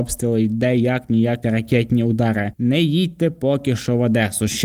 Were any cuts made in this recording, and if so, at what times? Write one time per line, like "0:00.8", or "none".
0:01.4